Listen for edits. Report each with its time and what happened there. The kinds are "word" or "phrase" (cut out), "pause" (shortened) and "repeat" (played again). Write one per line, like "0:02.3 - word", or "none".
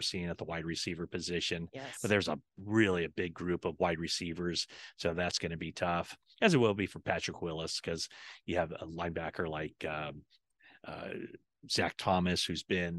none